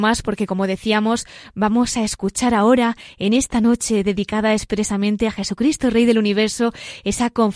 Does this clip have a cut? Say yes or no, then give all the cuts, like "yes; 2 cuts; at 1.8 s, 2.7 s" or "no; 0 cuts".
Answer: no; 0 cuts